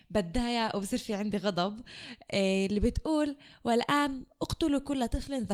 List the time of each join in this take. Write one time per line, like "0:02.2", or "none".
none

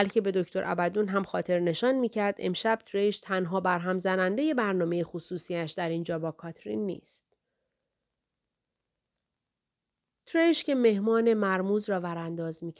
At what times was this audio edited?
none

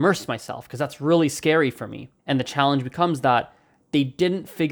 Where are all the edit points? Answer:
0:02.2

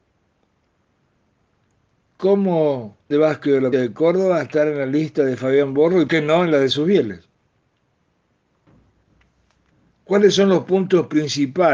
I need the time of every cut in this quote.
0:03.1
0:03.7
0:06.1

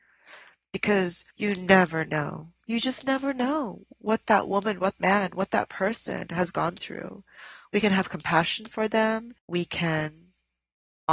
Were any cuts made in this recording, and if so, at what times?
0:01.3
0:05.0
0:09.4

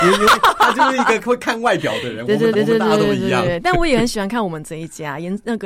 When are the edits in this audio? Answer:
0:02.5

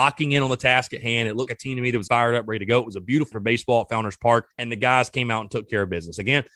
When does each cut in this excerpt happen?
0:01.5
0:02.1
0:03.3
0:04.5

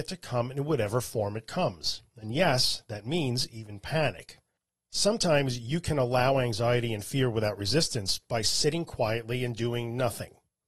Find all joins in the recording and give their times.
0:04.5

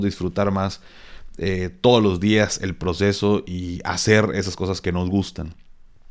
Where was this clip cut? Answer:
0:04.8

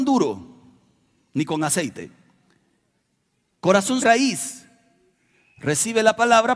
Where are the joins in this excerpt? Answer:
0:04.0

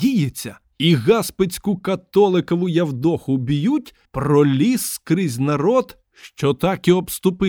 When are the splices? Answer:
0:04.0

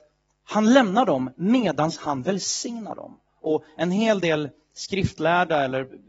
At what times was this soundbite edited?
none

